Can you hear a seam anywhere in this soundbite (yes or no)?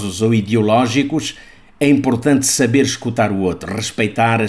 no